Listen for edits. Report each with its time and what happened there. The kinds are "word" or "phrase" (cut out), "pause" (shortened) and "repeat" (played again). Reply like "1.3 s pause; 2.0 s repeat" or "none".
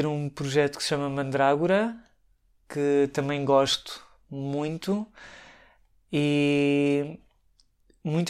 none

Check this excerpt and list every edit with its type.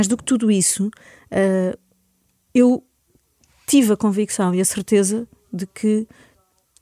none

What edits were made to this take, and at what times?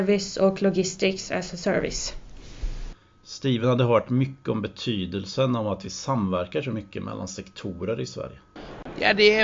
none

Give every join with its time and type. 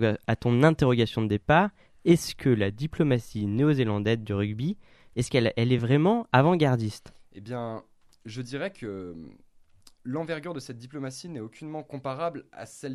none

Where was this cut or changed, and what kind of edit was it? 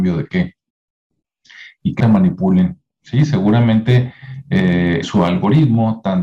2.0 s word; 5.0 s word

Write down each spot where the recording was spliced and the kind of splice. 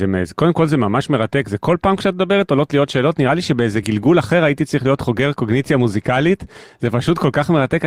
none

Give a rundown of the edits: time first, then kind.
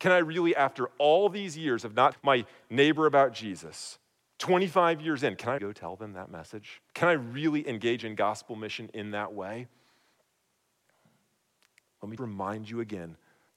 2.1 s word; 5.6 s word; 6.9 s pause; 12.2 s word

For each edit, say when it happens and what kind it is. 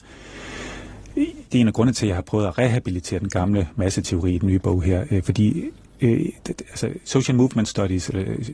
1.5 s pause

